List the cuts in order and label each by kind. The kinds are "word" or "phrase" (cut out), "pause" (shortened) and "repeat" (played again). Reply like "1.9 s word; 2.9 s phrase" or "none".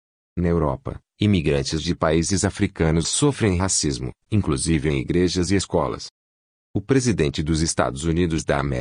none